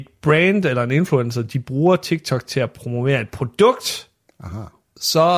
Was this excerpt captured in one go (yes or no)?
yes